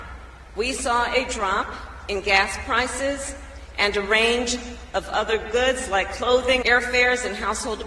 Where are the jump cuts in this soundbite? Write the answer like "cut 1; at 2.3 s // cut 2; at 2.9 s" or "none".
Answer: cut 1; at 6.6 s